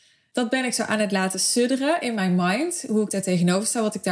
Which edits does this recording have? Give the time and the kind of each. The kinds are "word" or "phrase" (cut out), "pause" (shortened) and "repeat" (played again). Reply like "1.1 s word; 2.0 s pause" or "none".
none